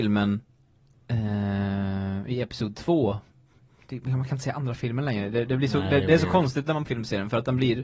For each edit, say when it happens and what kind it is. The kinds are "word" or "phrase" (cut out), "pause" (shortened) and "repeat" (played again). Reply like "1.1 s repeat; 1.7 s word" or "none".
6.8 s phrase